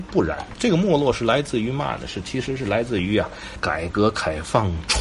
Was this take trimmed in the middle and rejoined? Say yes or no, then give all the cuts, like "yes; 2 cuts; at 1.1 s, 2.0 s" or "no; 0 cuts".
no; 0 cuts